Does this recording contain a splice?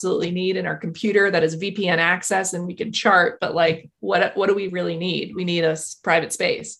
no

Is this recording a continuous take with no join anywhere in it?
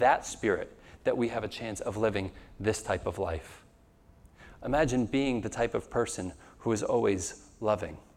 yes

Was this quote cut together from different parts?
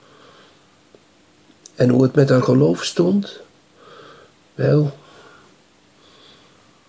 no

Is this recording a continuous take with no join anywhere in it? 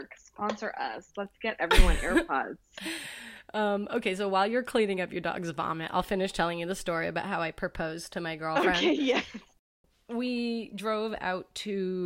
yes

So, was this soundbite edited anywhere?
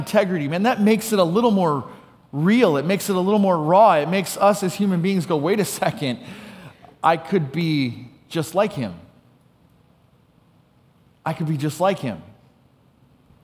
no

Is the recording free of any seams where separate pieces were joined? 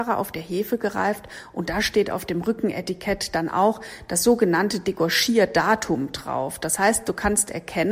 yes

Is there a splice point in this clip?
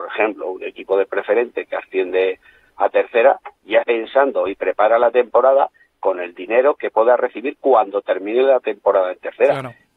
yes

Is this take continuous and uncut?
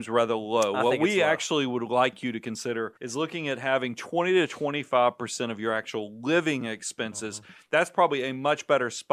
no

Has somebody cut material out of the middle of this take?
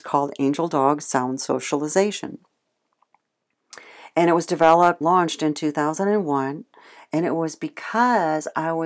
yes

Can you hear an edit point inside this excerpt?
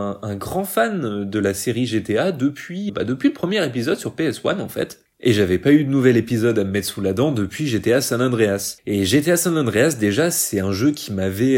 yes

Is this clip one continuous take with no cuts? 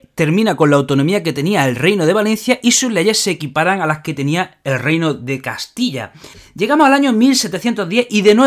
yes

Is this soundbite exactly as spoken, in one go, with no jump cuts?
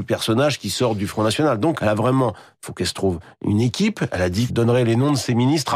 no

